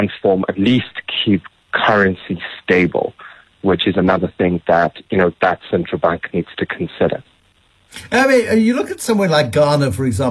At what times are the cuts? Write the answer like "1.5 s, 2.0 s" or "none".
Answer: none